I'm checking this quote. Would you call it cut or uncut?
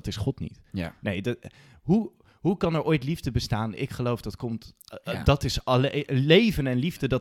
uncut